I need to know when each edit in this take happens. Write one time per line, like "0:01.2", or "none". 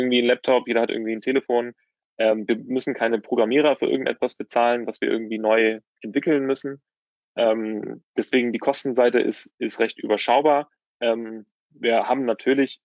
none